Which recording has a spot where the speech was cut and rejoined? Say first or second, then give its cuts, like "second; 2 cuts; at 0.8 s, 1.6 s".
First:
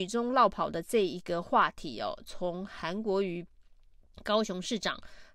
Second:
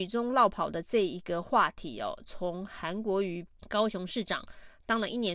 second; 1 cut; at 3.5 s